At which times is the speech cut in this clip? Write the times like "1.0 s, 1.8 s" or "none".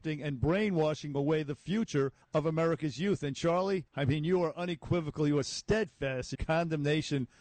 2.2 s, 3.9 s, 6.4 s